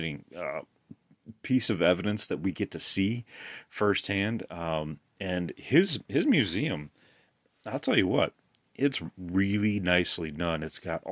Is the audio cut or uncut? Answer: uncut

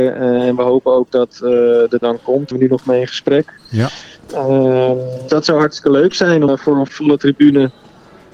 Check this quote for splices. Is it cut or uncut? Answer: cut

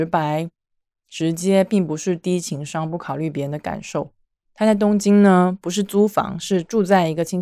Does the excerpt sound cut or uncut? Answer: uncut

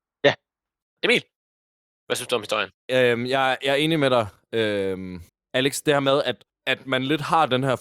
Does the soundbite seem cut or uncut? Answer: cut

